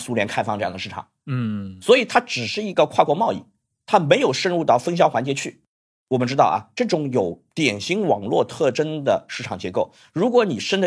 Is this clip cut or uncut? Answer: uncut